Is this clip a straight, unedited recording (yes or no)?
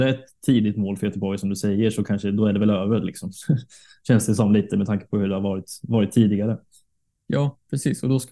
yes